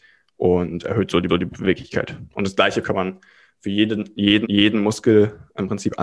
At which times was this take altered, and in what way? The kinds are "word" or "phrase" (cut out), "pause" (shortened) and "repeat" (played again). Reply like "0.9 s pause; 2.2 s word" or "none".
1.3 s repeat; 2.8 s word; 4.4 s repeat